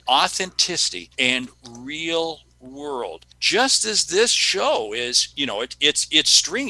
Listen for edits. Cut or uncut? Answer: cut